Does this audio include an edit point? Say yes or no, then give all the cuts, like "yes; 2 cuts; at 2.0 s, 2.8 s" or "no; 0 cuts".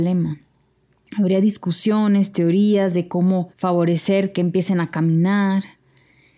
yes; 1 cut; at 3.5 s